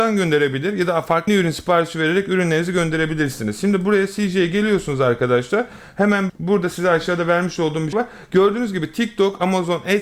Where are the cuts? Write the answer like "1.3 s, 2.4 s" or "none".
1.3 s, 6.3 s, 7.9 s